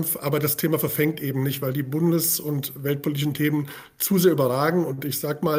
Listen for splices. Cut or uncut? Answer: uncut